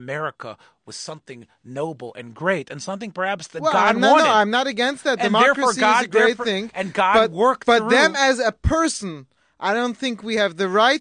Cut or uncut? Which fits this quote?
uncut